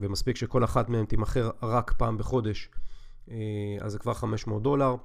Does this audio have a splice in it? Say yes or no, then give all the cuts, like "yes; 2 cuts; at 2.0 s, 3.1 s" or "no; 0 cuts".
no; 0 cuts